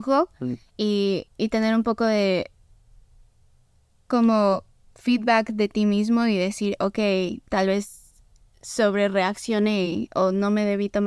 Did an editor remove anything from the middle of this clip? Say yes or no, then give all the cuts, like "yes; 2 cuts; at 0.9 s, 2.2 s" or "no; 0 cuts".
yes; 1 cut; at 1.3 s